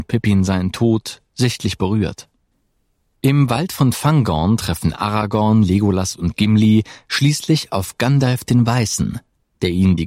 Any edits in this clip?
no; 0 cuts

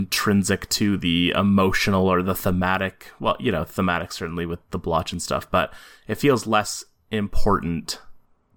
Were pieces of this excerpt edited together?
no; 0 cuts

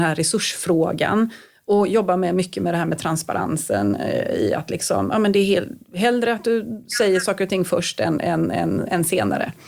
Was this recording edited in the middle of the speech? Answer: no; 0 cuts

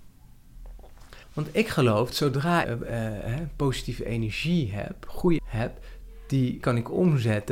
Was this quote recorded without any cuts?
no; 5 cuts; at 1.2 s, 2.1 s, 2.6 s, 5.4 s, 6.6 s

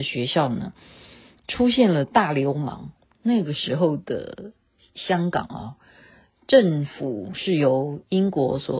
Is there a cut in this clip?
no; 0 cuts

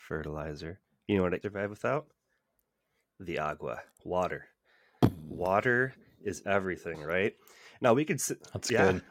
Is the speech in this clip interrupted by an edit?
yes; 1 cut; at 1.4 s

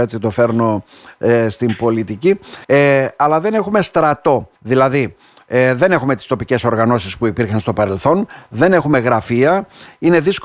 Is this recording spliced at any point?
yes; 2 cuts; at 2.6 s, 4.6 s

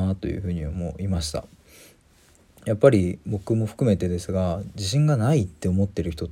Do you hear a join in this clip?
no; 0 cuts

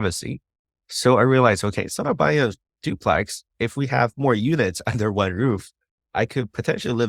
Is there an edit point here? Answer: no; 0 cuts

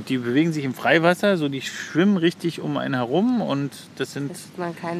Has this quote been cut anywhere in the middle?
no; 0 cuts

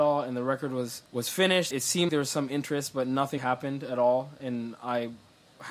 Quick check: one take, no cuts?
no; 4 cuts; at 1.1 s, 1.7 s, 2.1 s, 3.4 s

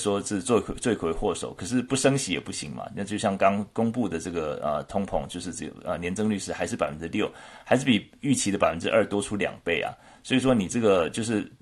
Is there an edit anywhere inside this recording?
no; 0 cuts

